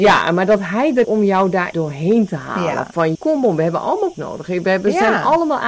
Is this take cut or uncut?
cut